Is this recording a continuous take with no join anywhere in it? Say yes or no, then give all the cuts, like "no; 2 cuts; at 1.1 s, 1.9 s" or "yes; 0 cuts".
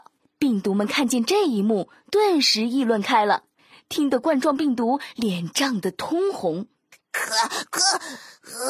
yes; 0 cuts